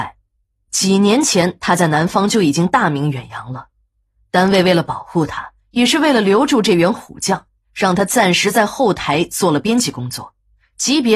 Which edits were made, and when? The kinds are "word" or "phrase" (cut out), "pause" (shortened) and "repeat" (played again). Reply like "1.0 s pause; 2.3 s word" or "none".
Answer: none